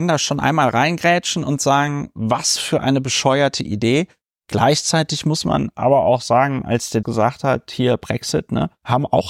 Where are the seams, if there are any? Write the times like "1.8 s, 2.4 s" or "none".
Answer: 7.0 s